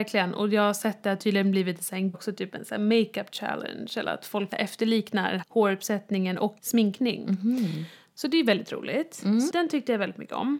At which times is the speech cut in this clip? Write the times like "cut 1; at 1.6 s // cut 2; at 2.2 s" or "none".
cut 1; at 2.1 s // cut 2; at 4.5 s // cut 3; at 5.4 s // cut 4; at 6.6 s // cut 5; at 9.5 s